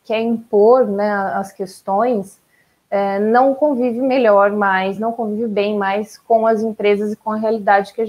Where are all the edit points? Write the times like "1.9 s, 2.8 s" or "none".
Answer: none